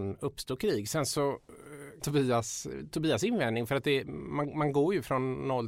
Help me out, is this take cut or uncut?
cut